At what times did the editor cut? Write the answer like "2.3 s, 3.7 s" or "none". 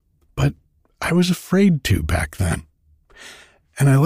none